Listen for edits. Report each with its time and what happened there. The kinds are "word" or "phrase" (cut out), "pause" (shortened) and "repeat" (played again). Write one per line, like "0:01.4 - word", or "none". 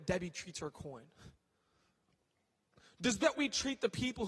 0:03.2 - word